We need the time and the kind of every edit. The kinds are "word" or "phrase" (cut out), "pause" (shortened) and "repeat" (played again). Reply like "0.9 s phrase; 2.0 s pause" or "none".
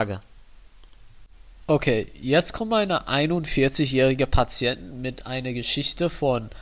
none